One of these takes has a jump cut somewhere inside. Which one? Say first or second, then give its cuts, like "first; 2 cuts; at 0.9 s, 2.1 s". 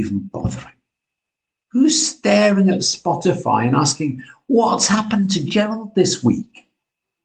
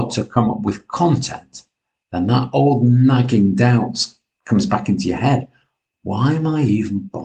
first; 1 cut; at 5.5 s